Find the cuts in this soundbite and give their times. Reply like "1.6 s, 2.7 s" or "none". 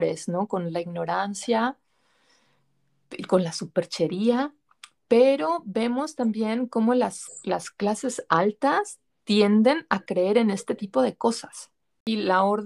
none